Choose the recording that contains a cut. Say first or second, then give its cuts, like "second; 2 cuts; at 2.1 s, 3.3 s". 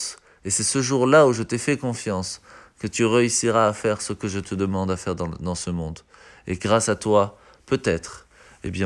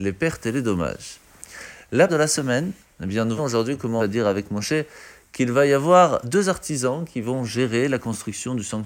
second; 4 cuts; at 2.1 s, 3.4 s, 4.0 s, 6.2 s